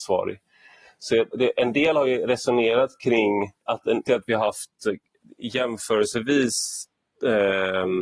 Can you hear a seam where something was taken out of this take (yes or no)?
yes